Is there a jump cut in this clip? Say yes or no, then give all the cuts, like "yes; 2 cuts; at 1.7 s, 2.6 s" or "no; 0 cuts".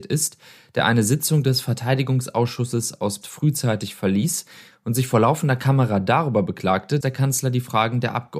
yes; 2 cuts; at 3.2 s, 7.0 s